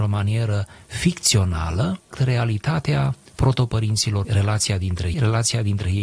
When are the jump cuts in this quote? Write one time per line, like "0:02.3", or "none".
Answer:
0:02.1
0:04.2
0:05.1